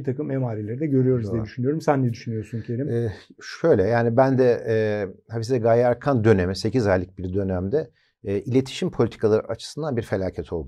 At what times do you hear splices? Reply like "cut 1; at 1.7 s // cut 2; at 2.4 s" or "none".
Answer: none